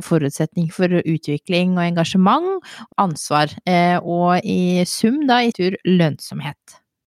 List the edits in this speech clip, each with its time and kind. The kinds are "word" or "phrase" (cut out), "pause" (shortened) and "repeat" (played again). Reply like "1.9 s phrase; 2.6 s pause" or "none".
2.9 s word; 5.5 s word